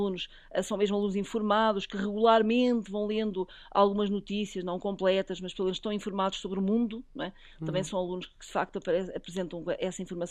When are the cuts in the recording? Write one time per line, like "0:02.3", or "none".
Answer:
none